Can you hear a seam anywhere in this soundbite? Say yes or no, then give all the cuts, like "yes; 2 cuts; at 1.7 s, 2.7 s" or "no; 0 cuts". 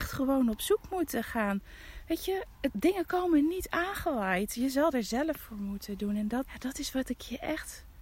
yes; 3 cuts; at 2.6 s, 5.4 s, 6.4 s